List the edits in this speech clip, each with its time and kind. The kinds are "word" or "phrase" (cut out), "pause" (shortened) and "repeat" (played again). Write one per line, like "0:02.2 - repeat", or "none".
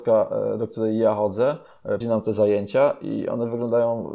0:02.0 - word